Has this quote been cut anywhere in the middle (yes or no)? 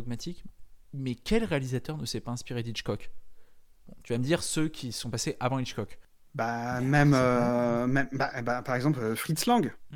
no